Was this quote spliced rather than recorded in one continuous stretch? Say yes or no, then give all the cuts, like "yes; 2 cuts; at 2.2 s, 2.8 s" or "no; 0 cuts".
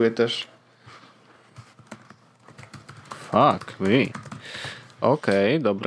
no; 0 cuts